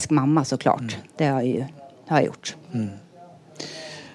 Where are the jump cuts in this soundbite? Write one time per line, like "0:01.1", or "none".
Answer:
none